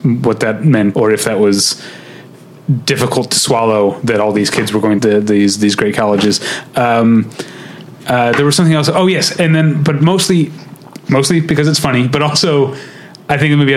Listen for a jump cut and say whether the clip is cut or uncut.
cut